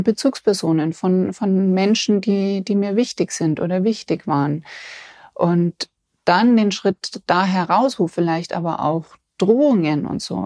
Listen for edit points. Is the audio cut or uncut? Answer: uncut